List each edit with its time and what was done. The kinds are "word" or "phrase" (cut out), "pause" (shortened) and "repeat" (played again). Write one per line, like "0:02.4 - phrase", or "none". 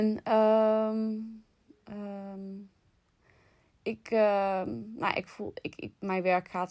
none